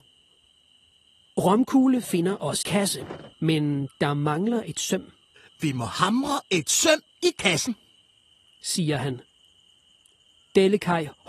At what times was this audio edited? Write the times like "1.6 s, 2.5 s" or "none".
2.6 s, 3.3 s, 5.4 s